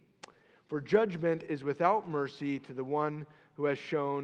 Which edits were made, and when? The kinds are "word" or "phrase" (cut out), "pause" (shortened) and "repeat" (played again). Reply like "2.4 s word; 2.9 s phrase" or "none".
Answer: none